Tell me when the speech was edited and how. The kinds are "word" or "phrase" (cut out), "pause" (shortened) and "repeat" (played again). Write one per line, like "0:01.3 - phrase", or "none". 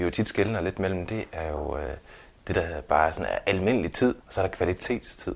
0:04.2 - pause